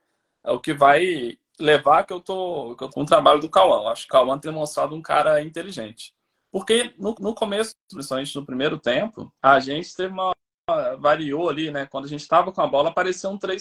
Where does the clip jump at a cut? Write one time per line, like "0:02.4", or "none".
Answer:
0:01.5
0:02.1
0:02.9
0:04.1
0:04.4
0:06.3
0:07.1
0:07.9
0:09.4

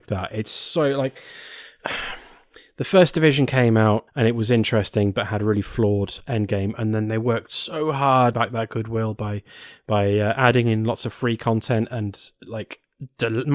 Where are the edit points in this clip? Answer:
0:04.1
0:08.3

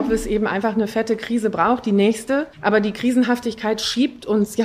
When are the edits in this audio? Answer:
0:02.5

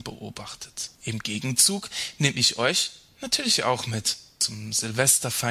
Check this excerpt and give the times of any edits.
0:00.9

